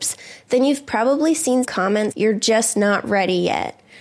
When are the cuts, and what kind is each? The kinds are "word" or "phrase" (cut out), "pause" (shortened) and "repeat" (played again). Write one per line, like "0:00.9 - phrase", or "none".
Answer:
0:01.6 - word
0:02.1 - word